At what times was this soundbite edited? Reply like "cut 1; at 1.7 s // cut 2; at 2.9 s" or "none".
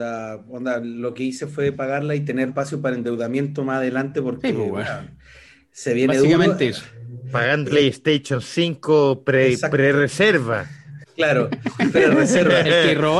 cut 1; at 2.5 s // cut 2; at 7.6 s